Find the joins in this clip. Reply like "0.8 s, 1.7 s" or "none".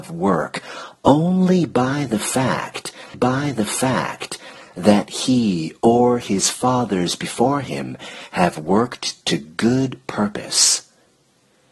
3.1 s